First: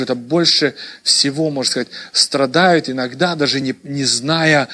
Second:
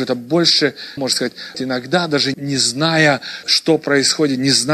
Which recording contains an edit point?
second; 4 cuts; at 1.0 s, 1.5 s, 2.3 s, 3.4 s

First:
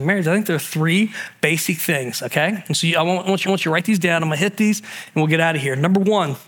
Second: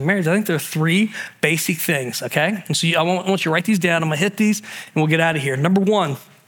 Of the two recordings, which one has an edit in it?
first; 1 cut; at 3.4 s

